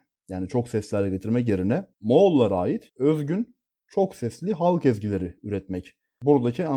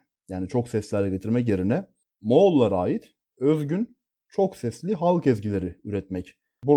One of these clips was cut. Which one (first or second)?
first